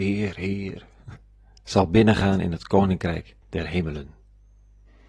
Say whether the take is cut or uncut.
cut